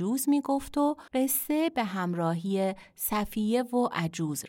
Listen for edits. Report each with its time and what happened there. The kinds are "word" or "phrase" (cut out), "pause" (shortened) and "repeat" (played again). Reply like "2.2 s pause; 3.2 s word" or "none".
1.1 s pause